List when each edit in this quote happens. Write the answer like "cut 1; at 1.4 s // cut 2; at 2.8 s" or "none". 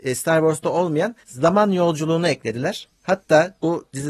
cut 1; at 1.2 s